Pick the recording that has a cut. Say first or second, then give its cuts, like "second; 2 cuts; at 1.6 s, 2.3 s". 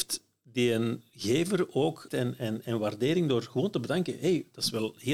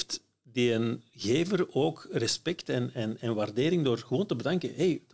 first; 1 cut; at 2.1 s